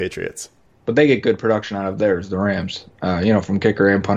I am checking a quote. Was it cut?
no; 0 cuts

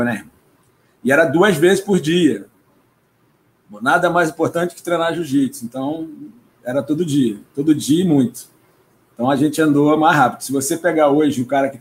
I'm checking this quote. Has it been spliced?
no; 0 cuts

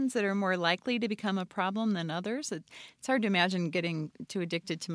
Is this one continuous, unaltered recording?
yes; 0 cuts

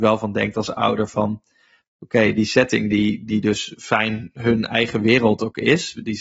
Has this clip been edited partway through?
no; 0 cuts

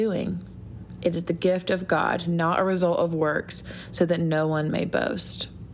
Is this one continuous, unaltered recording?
yes; 0 cuts

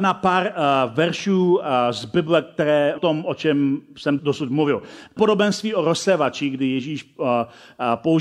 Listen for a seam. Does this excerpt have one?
yes; 3 cuts; at 3.0 s, 4.2 s, 5.2 s

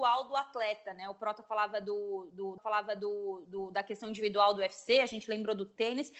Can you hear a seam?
yes; 1 cut; at 2.6 s

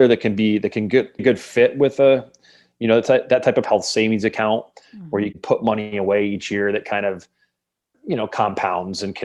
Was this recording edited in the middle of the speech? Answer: yes; 4 cuts; at 1.2 s, 3.6 s, 5.3 s, 7.9 s

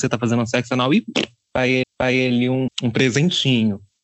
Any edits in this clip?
yes; 2 cuts; at 1.8 s, 2.7 s

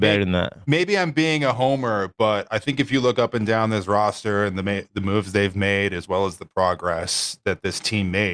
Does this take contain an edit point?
no; 0 cuts

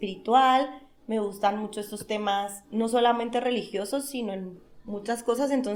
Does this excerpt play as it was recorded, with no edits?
yes; 0 cuts

